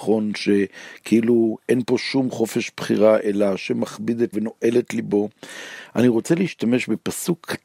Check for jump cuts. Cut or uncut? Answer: cut